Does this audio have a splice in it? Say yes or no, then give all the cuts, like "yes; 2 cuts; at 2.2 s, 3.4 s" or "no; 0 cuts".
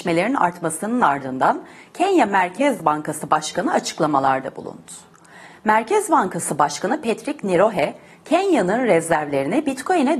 no; 0 cuts